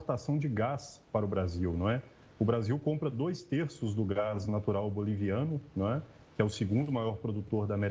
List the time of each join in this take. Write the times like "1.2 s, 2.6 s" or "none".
none